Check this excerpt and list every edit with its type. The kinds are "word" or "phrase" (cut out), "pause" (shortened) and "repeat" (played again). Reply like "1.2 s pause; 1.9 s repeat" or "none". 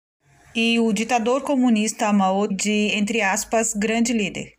2.5 s word